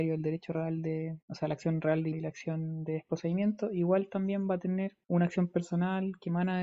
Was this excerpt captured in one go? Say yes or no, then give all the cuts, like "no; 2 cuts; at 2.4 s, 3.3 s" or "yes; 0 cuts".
no; 3 cuts; at 1.2 s, 2.1 s, 5.0 s